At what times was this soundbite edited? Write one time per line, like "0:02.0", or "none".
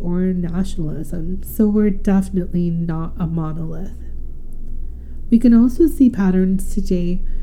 none